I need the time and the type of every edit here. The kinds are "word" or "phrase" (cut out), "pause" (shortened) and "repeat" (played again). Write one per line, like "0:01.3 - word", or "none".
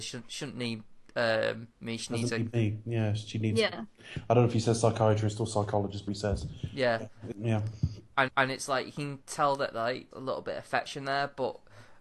0:06.1 - word
0:07.3 - word
0:08.3 - repeat
0:09.2 - pause
0:10.1 - word

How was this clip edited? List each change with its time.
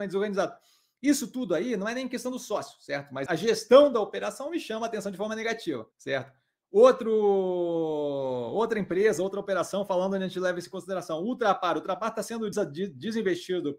0:03.3 - word
0:05.9 - pause
0:12.5 - word

